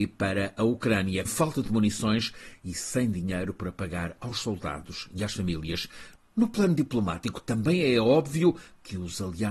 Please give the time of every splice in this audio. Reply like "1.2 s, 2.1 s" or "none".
1.3 s

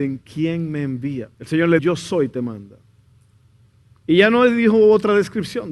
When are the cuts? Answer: 1.3 s, 1.8 s

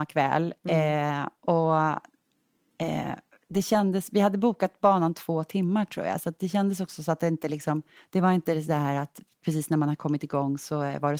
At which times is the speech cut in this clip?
8.0 s

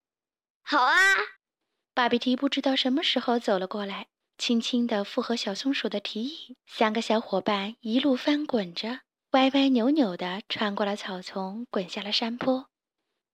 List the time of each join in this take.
1.4 s, 6.6 s

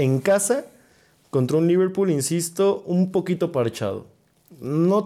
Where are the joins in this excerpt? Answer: none

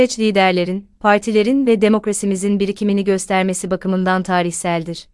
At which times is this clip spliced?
none

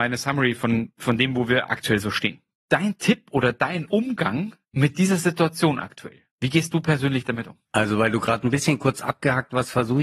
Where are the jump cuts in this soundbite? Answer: 2.5 s, 4.6 s, 6.3 s, 7.6 s

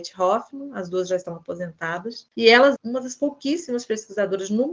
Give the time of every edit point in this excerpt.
2.8 s

